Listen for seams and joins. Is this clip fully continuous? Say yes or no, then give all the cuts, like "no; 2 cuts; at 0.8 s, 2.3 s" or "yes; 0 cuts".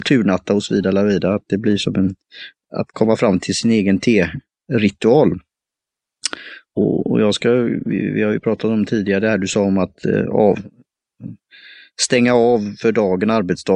no; 1 cut; at 6.7 s